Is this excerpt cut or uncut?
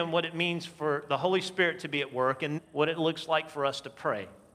cut